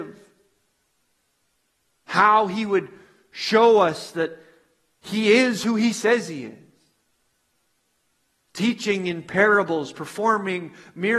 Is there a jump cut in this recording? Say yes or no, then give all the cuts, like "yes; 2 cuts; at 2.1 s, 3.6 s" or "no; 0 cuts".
no; 0 cuts